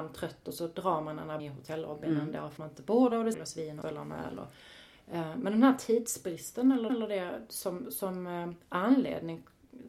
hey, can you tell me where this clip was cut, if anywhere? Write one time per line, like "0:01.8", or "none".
0:01.4
0:02.6
0:03.3
0:03.8
0:06.9